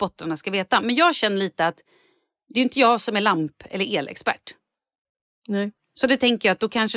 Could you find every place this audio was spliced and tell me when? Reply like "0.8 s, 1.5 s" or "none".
none